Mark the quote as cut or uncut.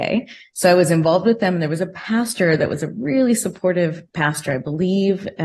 uncut